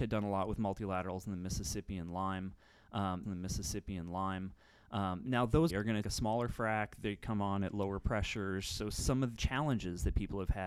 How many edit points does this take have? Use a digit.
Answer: 4